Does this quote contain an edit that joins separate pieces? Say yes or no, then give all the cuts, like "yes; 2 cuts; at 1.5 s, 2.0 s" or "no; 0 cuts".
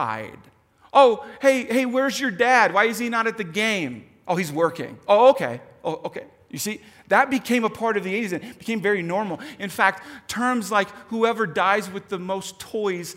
no; 0 cuts